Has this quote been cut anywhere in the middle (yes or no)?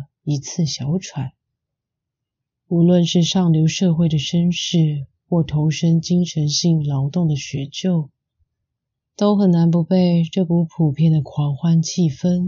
no